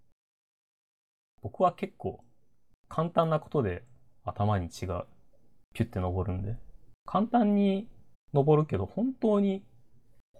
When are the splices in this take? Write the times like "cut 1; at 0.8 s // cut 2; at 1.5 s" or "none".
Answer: cut 1; at 7.0 s // cut 2; at 8.1 s